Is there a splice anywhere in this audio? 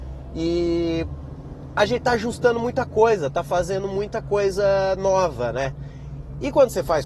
no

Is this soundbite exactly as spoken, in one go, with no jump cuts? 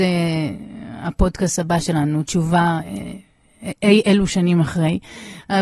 yes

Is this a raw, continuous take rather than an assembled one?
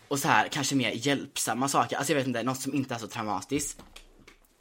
yes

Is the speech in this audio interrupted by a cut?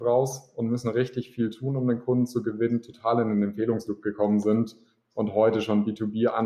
no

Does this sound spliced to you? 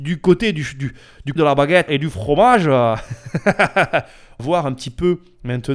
yes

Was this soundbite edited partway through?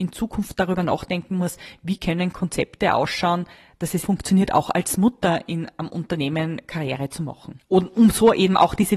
yes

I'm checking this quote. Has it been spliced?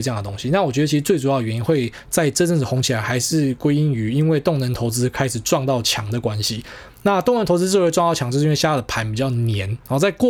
no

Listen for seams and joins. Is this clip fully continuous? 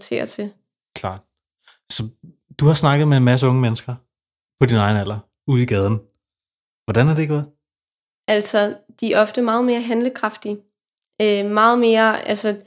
yes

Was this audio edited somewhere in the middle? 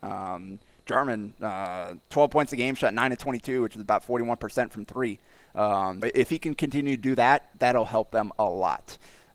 yes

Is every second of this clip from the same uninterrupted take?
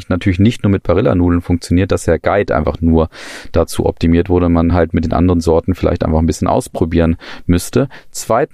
yes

